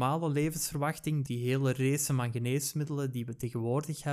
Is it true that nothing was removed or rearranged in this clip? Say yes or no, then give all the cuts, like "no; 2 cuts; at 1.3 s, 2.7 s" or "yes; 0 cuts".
no; 1 cut; at 1.3 s